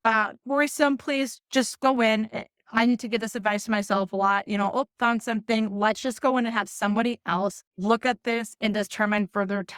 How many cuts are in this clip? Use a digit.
1